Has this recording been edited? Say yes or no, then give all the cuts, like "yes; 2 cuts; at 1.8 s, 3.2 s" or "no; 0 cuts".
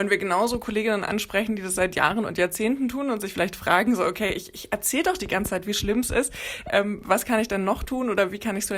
no; 0 cuts